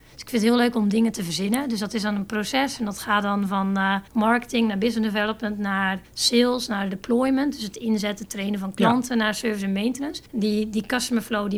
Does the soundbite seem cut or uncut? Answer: cut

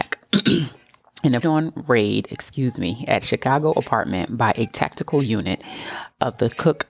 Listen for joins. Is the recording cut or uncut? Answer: cut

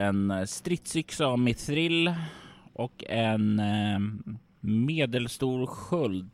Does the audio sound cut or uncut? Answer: uncut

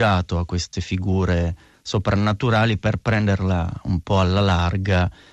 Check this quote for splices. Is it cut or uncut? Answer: uncut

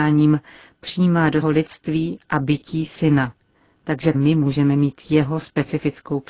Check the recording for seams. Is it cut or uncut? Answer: cut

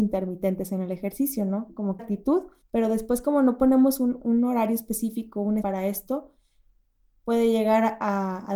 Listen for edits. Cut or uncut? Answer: cut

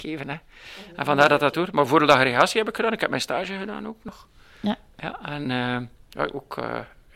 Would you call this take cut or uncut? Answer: uncut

